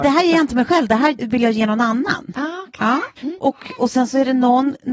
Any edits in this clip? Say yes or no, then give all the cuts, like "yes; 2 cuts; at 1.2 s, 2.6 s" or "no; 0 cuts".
yes; 2 cuts; at 1.2 s, 3.2 s